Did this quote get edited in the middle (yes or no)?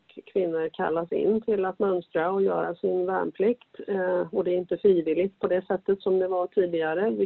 no